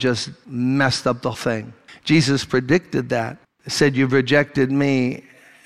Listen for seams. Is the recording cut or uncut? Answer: cut